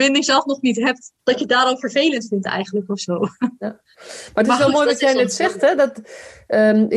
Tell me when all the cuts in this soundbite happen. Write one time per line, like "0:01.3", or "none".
0:01.2